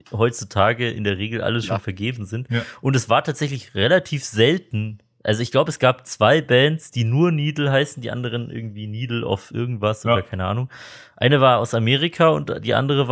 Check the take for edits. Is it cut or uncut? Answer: uncut